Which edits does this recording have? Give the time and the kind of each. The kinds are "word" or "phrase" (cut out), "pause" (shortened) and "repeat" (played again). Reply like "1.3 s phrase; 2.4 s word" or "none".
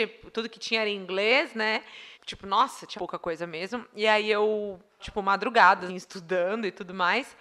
2.1 s pause; 3.0 s word; 5.0 s word; 5.9 s word